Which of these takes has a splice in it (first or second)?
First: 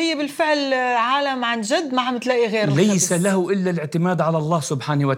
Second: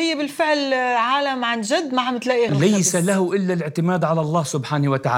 second